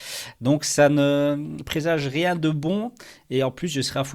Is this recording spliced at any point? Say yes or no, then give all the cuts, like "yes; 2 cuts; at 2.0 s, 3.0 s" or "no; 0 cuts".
no; 0 cuts